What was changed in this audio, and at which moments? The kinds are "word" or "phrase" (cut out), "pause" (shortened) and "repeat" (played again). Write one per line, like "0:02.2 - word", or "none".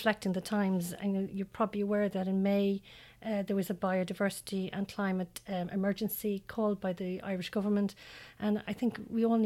none